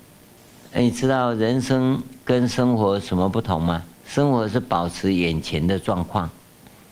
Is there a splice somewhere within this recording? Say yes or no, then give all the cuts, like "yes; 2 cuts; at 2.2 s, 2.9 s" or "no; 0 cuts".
yes; 2 cuts; at 2.2 s, 3.9 s